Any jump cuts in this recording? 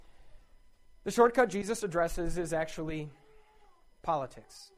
no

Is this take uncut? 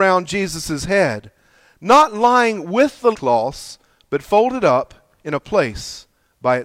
no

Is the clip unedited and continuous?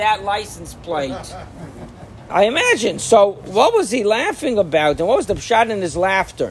no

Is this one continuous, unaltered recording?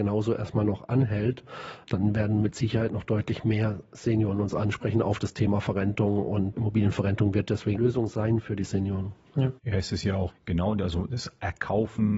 no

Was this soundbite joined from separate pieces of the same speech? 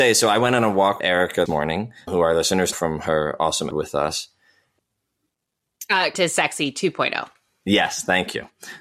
yes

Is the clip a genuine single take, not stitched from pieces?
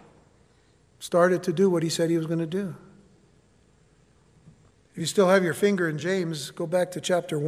yes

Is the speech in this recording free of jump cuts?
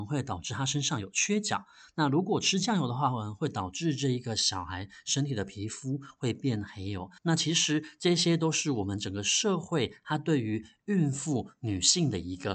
no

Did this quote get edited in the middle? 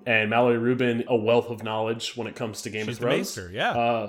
yes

